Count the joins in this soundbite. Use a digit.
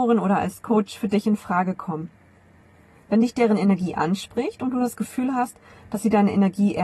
0